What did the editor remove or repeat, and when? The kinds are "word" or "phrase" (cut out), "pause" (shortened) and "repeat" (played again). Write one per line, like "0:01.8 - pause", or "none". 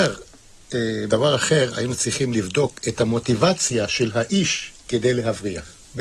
0:01.1 - word

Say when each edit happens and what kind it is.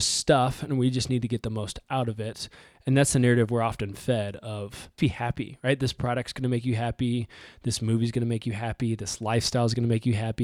0:05.0 - word

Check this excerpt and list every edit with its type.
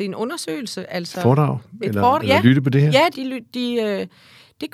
0:02.2 - word
0:03.1 - phrase

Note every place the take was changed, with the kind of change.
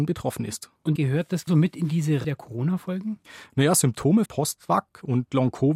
0:01.0 - word
0:01.5 - word
0:02.2 - word
0:04.3 - word

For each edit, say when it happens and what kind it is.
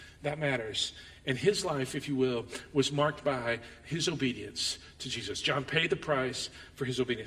none

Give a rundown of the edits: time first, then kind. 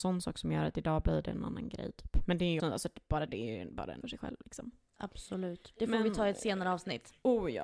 0:02.6 - word
0:03.3 - word
0:04.0 - phrase

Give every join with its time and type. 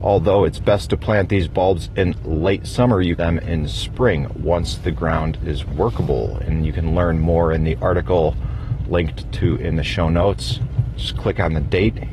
0:03.2 - phrase

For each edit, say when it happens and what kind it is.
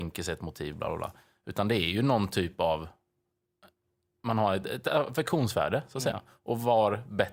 none

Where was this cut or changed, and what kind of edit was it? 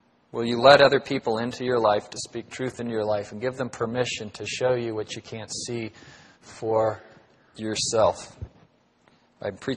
none

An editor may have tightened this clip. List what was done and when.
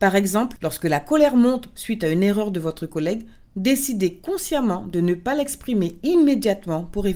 none

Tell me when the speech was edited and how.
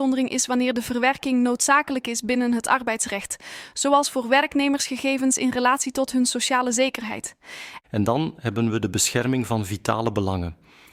none

